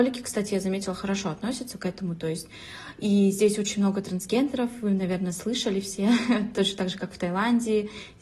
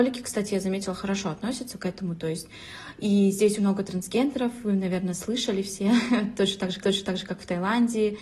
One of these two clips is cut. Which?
second; 2 cuts; at 3.6 s, 6.8 s

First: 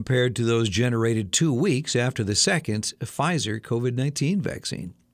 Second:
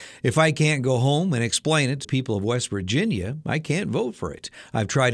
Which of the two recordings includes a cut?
second; 1 cut; at 2.0 s

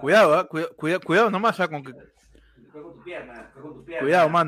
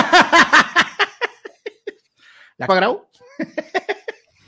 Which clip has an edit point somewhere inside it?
second; 1 cut; at 2.7 s

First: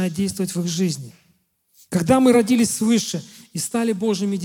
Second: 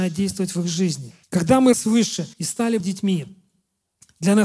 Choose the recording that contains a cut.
second; 4 cuts; at 1.2 s, 1.7 s, 2.3 s, 2.8 s

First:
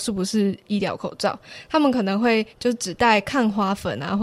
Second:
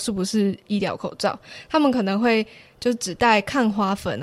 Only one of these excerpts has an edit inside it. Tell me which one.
first; 1 cut; at 2.5 s

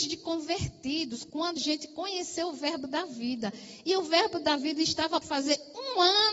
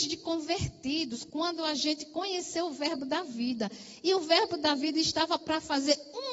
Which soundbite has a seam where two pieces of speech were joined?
first; 2 cuts; at 1.6 s, 5.2 s

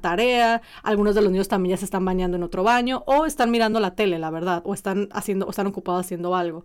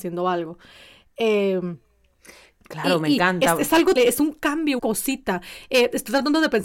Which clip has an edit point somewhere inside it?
second; 2 cuts; at 4.0 s, 4.8 s

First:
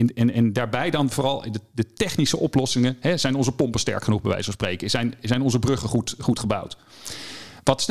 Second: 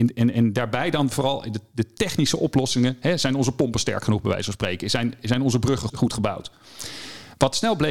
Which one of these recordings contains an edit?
second; 1 cut; at 5.9 s

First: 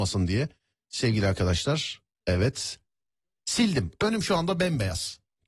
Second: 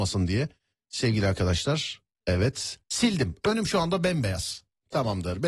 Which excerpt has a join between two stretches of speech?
second; 1 cut; at 2.8 s

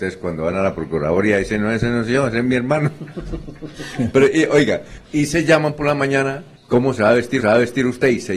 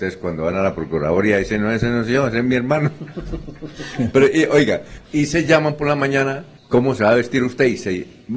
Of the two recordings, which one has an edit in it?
first; 1 cut; at 7.4 s

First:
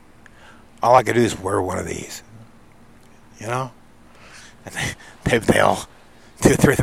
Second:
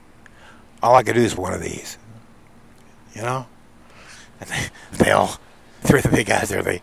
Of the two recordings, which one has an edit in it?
second; 3 cuts; at 1.4 s, 4.9 s, 5.8 s

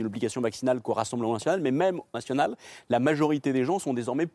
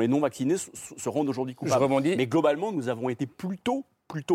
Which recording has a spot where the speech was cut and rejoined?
first; 1 cut; at 2.1 s

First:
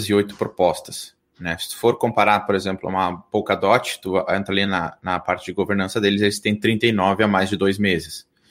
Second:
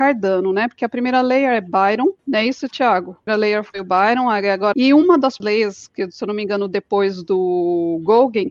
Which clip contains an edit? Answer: second; 4 cuts; at 2.2 s, 3.3 s, 4.7 s, 5.4 s

